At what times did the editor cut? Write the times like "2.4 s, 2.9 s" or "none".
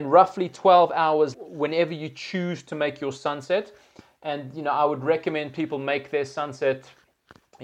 1.3 s